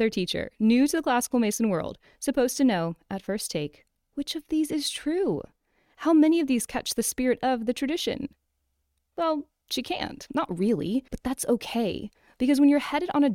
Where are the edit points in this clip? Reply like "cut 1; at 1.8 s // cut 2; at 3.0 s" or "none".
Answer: cut 1; at 11.1 s